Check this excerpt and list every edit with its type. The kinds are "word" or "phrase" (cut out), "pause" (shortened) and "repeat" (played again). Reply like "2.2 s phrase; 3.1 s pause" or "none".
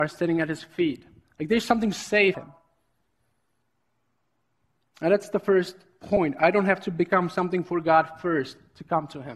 2.3 s word